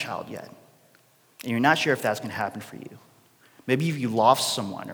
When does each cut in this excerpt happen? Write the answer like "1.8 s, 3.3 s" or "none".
none

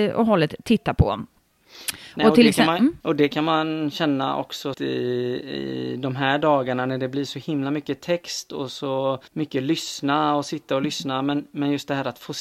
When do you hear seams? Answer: 3.0 s, 4.7 s, 9.3 s

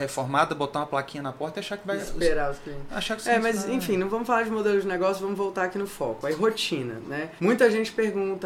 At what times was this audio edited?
7.4 s

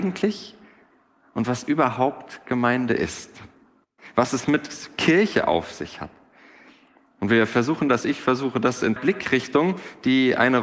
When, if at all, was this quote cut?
9.0 s

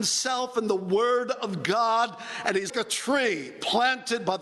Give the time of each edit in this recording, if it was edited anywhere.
2.7 s

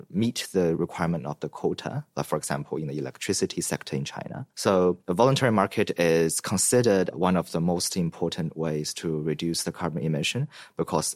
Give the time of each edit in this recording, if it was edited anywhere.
4.5 s

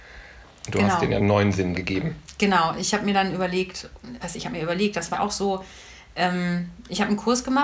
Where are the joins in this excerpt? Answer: 1.2 s, 1.7 s, 4.2 s, 5.1 s

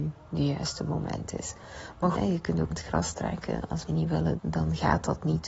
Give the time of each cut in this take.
2.1 s, 2.7 s, 3.9 s, 4.4 s

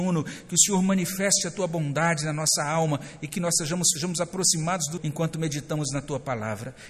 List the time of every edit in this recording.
4.0 s, 5.0 s

